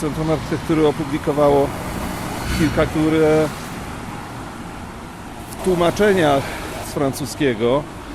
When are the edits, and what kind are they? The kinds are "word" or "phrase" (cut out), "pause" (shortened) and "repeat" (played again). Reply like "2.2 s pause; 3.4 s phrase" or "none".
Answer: 2.9 s word; 5.6 s word; 6.8 s word